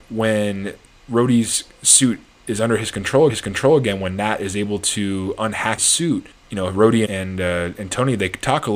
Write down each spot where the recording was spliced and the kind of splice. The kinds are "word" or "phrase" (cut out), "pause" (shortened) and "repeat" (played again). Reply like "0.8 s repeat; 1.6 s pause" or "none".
3.3 s repeat; 5.8 s word; 6.3 s pause; 7.0 s word